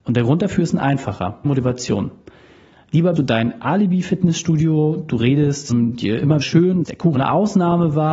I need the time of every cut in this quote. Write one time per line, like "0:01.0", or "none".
0:01.4
0:03.2
0:05.7
0:06.4
0:06.8
0:07.1